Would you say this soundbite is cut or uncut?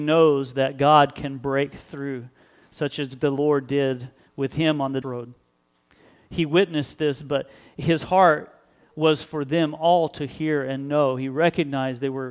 cut